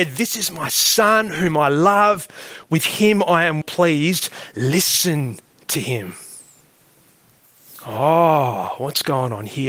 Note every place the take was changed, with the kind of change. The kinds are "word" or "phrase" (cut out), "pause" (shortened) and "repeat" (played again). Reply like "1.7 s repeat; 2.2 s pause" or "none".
3.6 s word; 5.5 s pause